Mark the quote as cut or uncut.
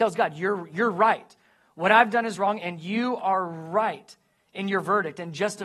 uncut